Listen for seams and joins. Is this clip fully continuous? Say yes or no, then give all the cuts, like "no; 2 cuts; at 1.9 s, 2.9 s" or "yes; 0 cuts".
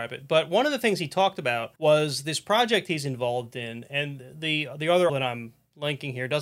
no; 2 cuts; at 1.8 s, 5.1 s